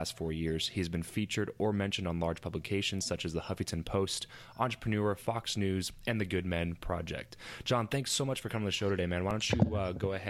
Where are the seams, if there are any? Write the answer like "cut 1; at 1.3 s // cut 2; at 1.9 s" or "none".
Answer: none